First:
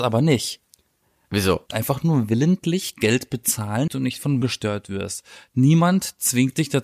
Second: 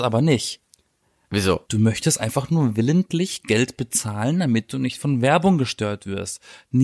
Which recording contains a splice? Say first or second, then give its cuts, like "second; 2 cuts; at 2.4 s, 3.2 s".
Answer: first; 3 cuts; at 1.7 s, 3.9 s, 4.4 s